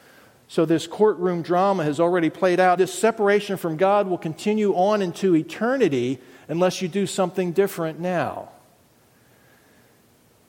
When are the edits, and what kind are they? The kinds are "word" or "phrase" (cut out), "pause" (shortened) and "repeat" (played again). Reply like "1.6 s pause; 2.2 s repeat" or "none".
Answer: 2.8 s word

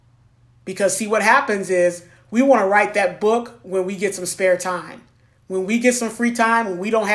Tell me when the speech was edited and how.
none

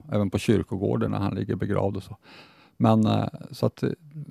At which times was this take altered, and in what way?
none

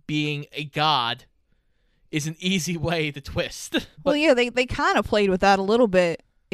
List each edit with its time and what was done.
3.9 s pause

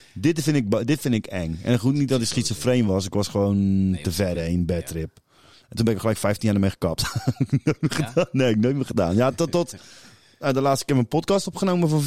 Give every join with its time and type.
none

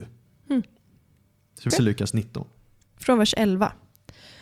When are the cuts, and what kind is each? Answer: 1.7 s word

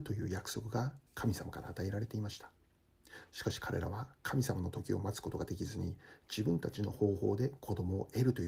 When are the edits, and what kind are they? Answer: 1.1 s pause

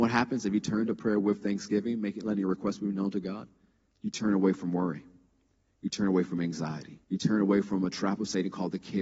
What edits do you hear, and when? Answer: 7.0 s pause

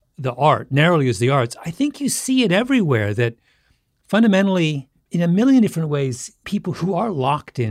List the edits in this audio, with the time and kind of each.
4.9 s pause; 6.4 s word

